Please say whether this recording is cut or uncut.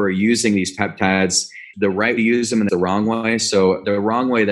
cut